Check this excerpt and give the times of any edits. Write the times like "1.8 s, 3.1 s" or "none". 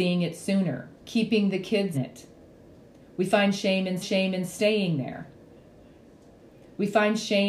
1.0 s, 1.9 s, 4.0 s